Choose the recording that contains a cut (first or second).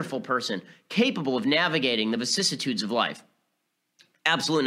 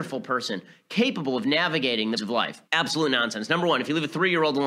second